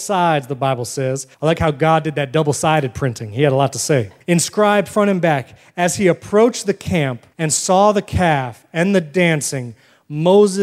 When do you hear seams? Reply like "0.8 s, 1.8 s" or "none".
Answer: 1.3 s, 4.2 s, 7.3 s